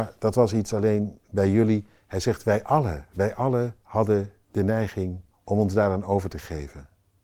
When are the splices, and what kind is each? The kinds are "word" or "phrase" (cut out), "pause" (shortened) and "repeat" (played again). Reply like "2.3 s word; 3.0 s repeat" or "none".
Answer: 3.8 s pause; 5.3 s pause